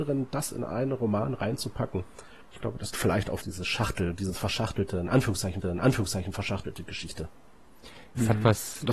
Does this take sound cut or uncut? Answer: cut